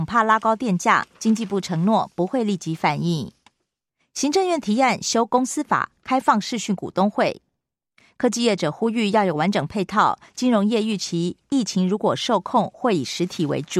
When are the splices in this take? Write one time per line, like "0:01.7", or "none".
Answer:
0:03.9